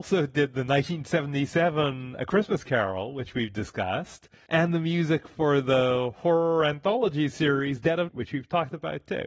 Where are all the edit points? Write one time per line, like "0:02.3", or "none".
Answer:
0:08.1